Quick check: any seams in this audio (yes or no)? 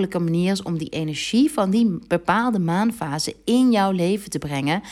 no